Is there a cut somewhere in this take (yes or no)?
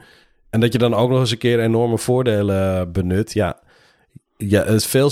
no